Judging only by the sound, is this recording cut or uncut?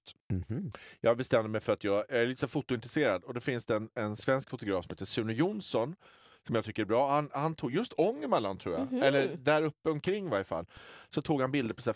uncut